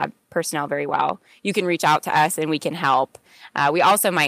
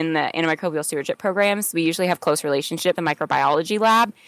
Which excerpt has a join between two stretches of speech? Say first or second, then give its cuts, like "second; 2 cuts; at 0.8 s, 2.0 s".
second; 1 cut; at 2.9 s